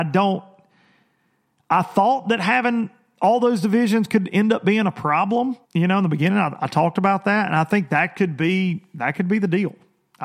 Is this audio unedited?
no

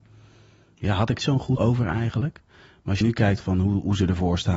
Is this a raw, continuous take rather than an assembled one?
no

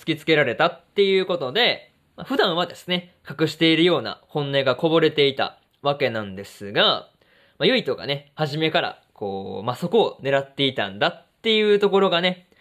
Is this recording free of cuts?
yes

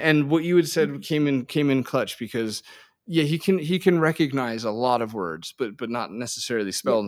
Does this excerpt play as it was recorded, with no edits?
yes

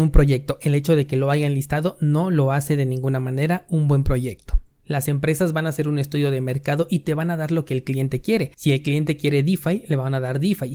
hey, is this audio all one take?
no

